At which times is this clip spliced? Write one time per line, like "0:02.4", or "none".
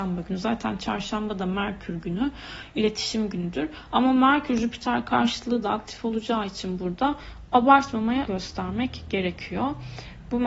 0:08.3